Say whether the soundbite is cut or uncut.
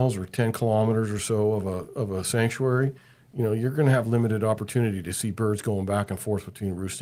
uncut